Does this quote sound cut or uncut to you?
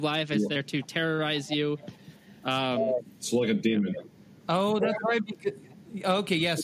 uncut